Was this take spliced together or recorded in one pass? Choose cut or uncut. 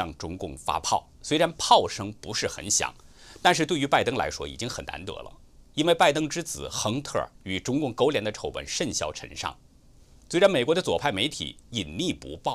cut